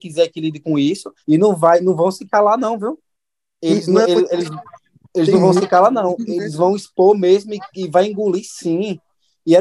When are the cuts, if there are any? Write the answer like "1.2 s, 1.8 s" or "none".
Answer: 1.2 s